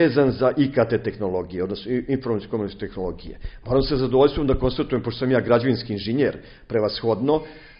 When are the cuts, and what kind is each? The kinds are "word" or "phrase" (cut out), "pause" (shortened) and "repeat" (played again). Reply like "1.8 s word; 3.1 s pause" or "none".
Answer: none